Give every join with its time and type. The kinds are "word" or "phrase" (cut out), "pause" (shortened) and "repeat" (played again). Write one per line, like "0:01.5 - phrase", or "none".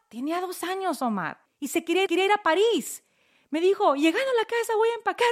0:01.5 - word
0:02.1 - repeat